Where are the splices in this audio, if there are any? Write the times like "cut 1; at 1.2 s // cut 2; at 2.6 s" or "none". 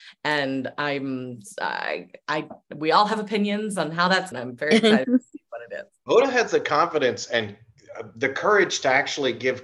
cut 1; at 4.3 s